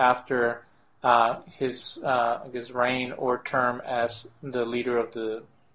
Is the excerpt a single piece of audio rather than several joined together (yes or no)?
yes